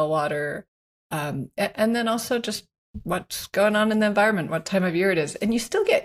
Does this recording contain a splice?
no; 0 cuts

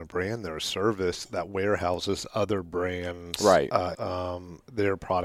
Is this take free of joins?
no; 1 cut; at 3.9 s

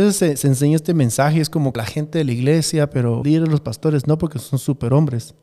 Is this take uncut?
no; 2 cuts; at 1.8 s, 3.2 s

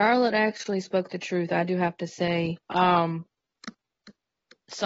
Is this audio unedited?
no; 1 cut; at 2.6 s

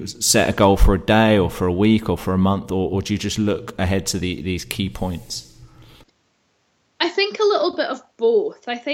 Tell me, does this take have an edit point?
no; 0 cuts

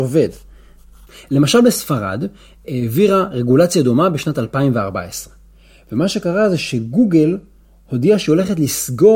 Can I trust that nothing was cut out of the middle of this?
yes; 0 cuts

